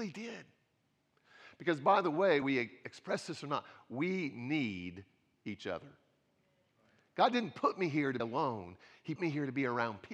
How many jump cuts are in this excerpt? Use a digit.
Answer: 3